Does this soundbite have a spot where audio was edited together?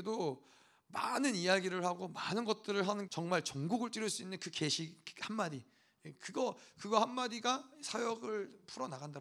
yes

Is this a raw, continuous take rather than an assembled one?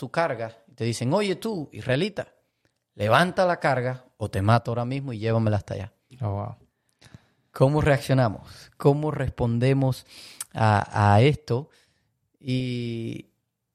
yes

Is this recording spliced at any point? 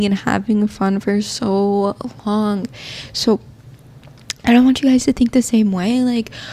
no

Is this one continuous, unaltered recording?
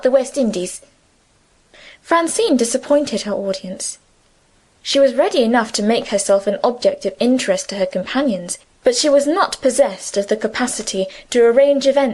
yes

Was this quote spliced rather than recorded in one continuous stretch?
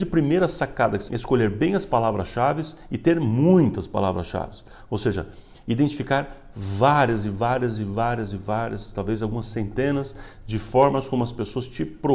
yes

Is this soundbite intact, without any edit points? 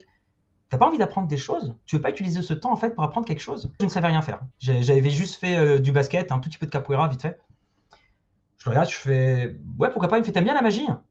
no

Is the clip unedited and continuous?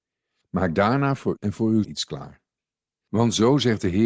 no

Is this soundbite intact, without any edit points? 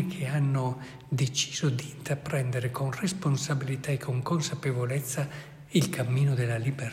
yes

